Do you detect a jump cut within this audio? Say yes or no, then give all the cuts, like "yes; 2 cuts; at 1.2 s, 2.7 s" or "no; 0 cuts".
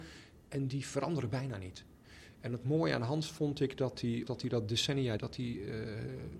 yes; 2 cuts; at 4.3 s, 5.2 s